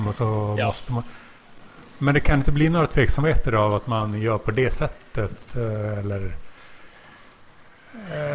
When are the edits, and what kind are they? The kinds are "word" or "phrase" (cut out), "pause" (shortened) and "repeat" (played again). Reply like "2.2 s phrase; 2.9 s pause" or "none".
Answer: none